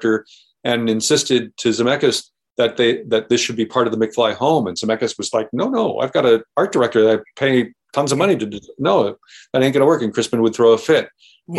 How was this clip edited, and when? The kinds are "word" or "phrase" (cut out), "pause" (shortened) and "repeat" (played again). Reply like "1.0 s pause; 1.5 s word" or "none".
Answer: none

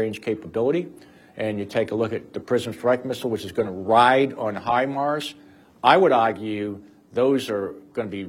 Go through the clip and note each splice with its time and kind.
none

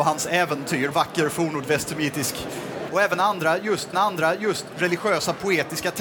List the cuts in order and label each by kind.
0.9 s word; 2.9 s word; 3.9 s repeat

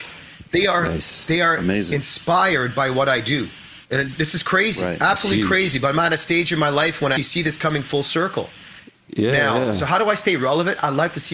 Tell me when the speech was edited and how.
3.8 s pause; 7.2 s word

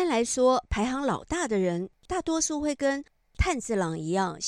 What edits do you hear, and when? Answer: 2.0 s pause

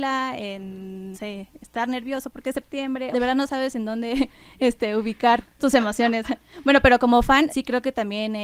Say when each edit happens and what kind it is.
1.1 s word; 3.1 s phrase; 5.4 s word; 7.5 s word

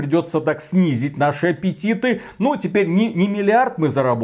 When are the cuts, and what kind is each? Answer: none

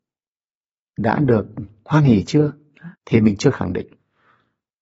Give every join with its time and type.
2.9 s pause

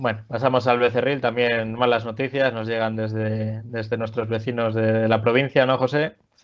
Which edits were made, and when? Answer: none

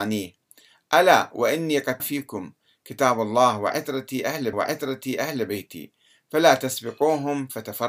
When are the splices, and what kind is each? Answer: 2.0 s word; 4.5 s repeat

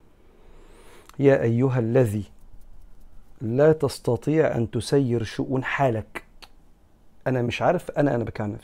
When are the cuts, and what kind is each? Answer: none

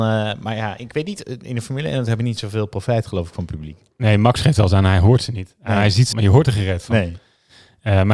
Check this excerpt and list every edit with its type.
6.1 s word

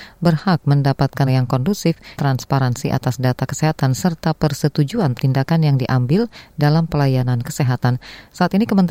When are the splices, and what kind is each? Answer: 1.3 s phrase; 2.1 s word; 5.1 s word

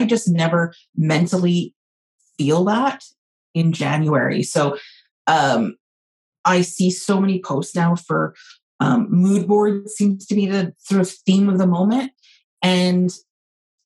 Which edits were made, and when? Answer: none

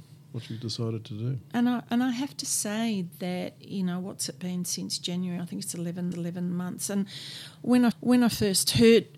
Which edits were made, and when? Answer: 6.1 s repeat; 7.9 s repeat

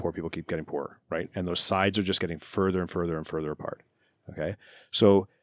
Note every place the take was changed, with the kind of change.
none

